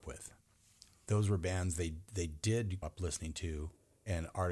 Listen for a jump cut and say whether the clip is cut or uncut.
cut